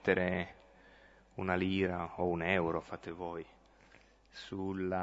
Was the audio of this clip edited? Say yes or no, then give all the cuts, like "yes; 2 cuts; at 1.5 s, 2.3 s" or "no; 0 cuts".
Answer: no; 0 cuts